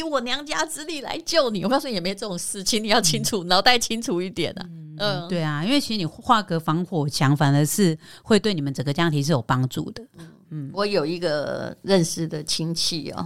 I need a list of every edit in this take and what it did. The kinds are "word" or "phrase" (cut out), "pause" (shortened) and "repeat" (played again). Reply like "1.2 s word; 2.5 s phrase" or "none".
none